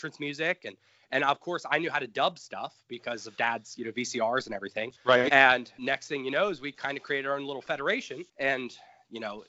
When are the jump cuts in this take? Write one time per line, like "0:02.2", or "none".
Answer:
0:05.0
0:05.8
0:08.3

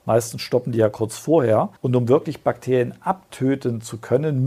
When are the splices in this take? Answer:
0:01.8

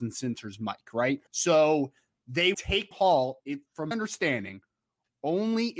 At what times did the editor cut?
0:01.3
0:02.5
0:02.9
0:03.4
0:03.9

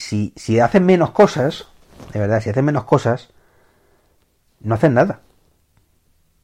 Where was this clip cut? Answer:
none

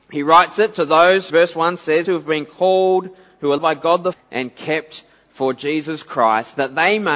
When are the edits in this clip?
0:01.3
0:02.0
0:03.6
0:04.1

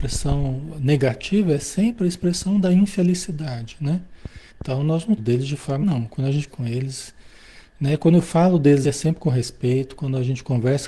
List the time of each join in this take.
0:04.5
0:05.2
0:05.8
0:06.5
0:08.8

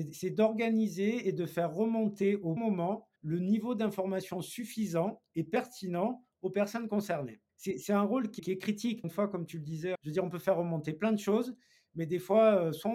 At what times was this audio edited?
0:02.6
0:03.2
0:07.5
0:08.4
0:09.0
0:09.9

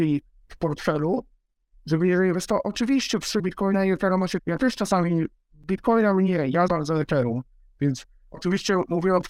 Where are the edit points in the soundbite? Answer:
0:03.4
0:04.4
0:06.7

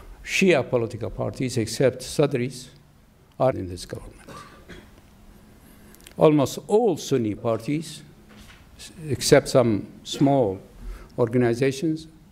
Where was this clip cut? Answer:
0:03.5
0:06.1
0:07.4

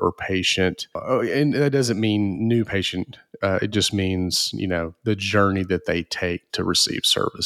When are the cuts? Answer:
none

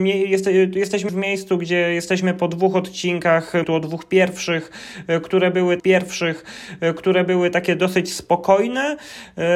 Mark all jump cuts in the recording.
0:01.1
0:03.6
0:05.8

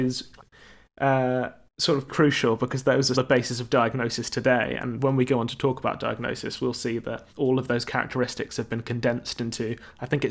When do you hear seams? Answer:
0:02.1
0:03.1
0:07.3

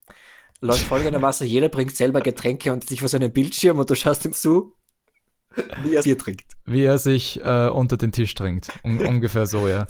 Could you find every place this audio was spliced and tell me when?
0:02.8
0:04.3
0:06.0
0:06.6

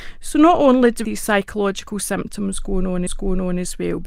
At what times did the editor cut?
0:01.0
0:03.1

